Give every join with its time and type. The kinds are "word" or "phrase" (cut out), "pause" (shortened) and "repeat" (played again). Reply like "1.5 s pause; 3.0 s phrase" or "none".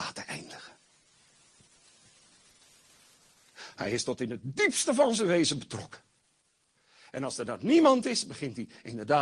none